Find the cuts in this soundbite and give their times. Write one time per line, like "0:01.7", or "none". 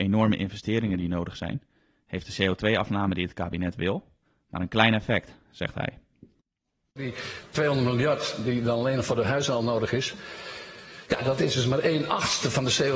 none